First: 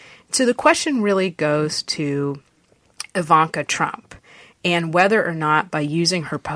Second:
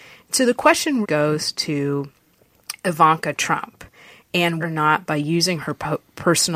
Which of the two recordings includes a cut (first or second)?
second